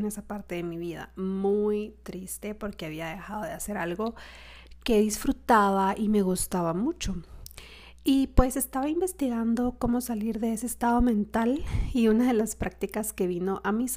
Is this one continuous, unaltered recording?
yes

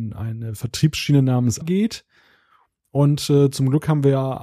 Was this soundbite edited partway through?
yes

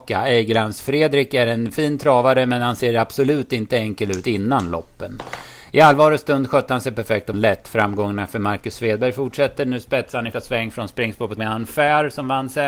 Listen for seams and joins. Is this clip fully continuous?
no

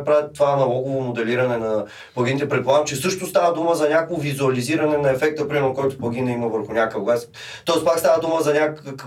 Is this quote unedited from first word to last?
yes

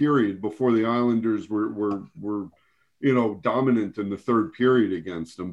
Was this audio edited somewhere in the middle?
no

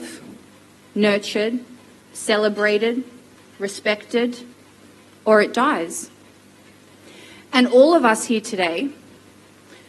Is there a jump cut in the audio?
no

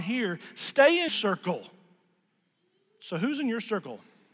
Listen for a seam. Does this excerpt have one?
yes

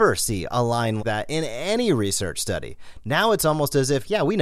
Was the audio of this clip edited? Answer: yes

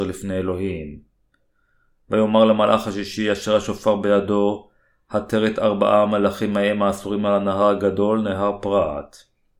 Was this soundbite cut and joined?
no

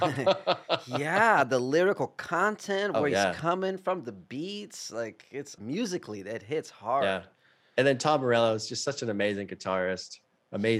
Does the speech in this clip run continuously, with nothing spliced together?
no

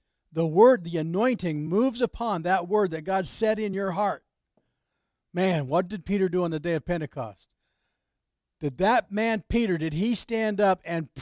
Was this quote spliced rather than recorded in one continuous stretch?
no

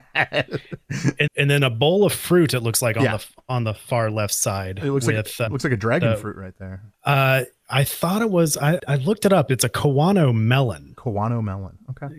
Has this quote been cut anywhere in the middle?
yes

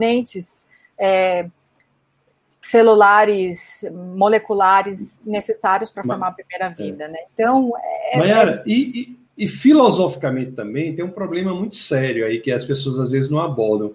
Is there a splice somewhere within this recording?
yes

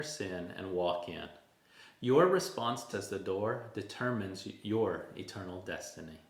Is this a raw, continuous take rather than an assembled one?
no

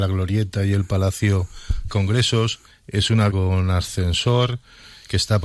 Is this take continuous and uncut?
no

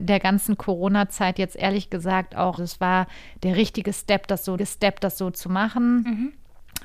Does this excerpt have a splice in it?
yes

